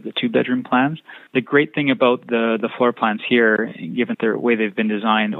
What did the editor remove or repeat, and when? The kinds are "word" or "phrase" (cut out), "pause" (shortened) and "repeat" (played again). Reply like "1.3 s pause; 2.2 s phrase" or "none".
1.3 s pause; 4.1 s word